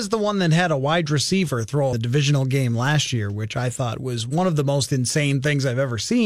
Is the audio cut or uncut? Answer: cut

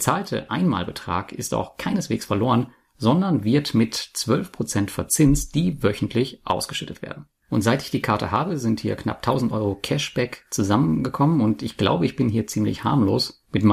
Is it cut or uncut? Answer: uncut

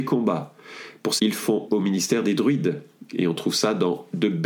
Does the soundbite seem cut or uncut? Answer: cut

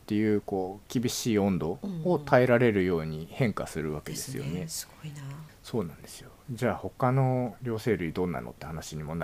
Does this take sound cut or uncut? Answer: cut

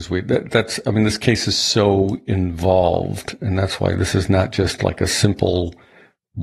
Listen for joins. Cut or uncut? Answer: uncut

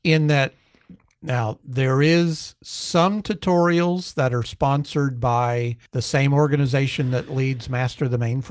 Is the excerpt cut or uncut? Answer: cut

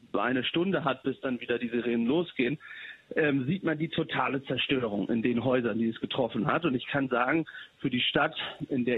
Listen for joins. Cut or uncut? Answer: uncut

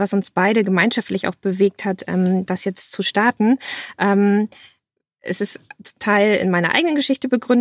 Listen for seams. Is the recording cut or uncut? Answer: uncut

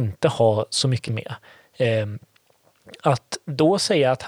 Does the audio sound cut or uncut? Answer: cut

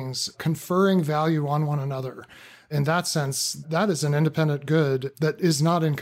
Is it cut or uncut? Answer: uncut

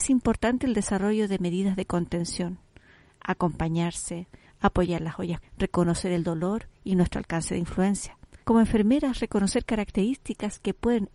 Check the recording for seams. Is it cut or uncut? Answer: cut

